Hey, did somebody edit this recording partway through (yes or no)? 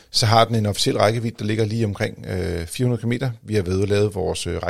no